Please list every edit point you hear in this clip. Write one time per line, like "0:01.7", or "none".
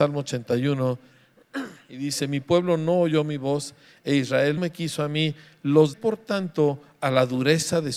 0:04.6
0:05.9